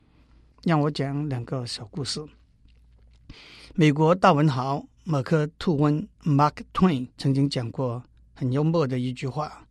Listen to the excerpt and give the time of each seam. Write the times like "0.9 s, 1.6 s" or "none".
5.0 s, 6.1 s, 7.1 s, 8.2 s